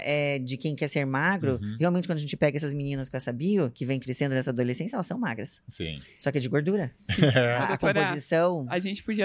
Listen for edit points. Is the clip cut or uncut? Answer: uncut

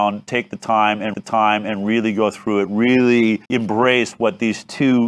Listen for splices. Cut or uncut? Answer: cut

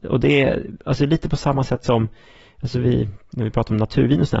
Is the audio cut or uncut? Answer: uncut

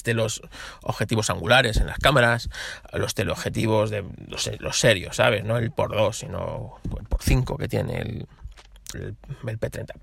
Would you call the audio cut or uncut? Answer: cut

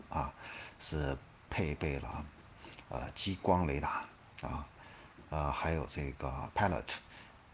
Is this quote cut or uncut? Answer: cut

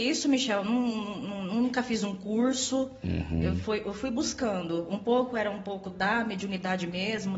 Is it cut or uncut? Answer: uncut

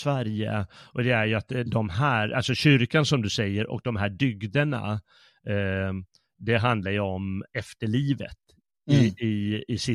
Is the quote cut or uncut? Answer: uncut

